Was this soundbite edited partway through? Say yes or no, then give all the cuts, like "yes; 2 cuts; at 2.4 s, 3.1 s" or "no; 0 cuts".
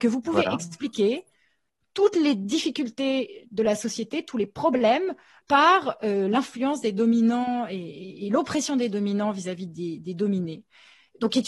yes; 1 cut; at 5.4 s